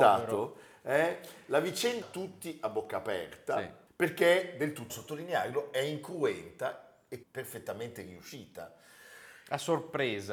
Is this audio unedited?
no; 3 cuts; at 2.0 s, 4.9 s, 7.2 s

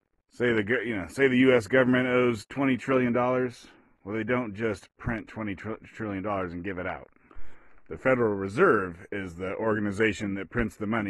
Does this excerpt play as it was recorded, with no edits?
yes; 0 cuts

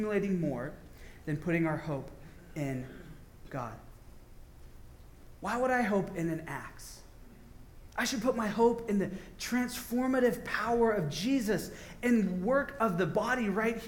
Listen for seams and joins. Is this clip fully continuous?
yes; 0 cuts

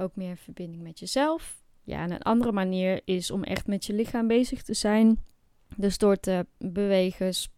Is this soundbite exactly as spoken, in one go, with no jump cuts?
yes; 0 cuts

